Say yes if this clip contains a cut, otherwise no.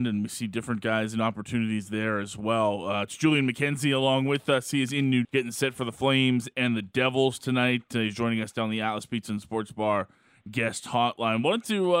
yes